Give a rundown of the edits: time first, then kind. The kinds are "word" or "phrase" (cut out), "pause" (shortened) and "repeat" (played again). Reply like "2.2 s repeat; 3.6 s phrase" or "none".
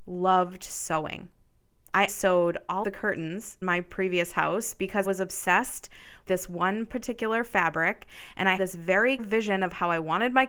2.1 s word; 2.8 s word; 3.6 s word; 5.0 s word; 6.3 s word; 8.6 s word; 9.2 s word